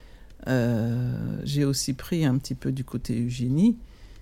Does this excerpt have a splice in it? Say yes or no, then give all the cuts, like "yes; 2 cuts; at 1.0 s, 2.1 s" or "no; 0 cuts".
no; 0 cuts